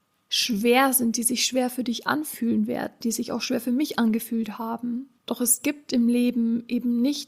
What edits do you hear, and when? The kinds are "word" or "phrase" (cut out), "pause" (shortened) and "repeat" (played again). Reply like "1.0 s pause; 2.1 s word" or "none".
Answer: 5.2 s pause